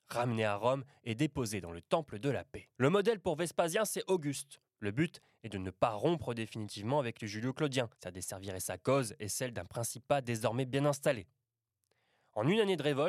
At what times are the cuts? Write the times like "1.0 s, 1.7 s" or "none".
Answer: 2.7 s, 4.7 s, 7.9 s